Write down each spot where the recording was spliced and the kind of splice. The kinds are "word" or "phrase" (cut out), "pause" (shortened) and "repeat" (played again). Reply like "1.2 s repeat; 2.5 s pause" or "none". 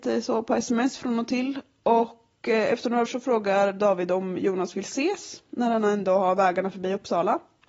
3.1 s word